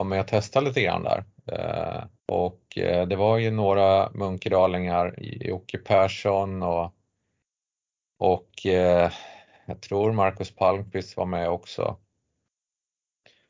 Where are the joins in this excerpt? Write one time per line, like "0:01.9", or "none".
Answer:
0:02.2
0:05.2
0:09.8